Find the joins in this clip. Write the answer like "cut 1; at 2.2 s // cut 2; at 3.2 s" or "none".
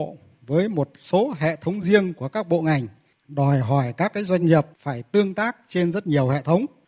none

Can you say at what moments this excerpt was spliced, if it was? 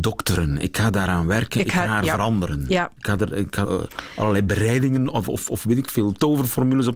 cut 1; at 3.0 s // cut 2; at 3.6 s

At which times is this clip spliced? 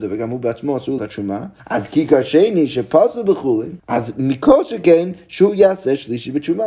cut 1; at 1.0 s // cut 2; at 1.6 s // cut 3; at 3.8 s

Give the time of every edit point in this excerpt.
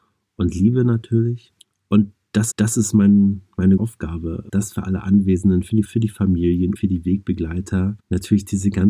cut 1; at 1.6 s // cut 2; at 2.5 s // cut 3; at 3.8 s // cut 4; at 4.5 s // cut 5; at 5.9 s // cut 6; at 6.8 s // cut 7; at 8.0 s

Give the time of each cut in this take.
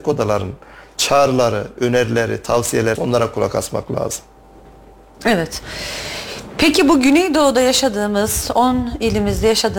cut 1; at 3.0 s

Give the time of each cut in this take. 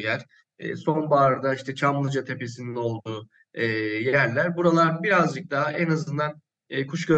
none

